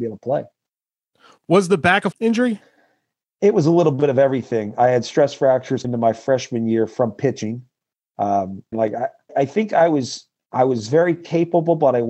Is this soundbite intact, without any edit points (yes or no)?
no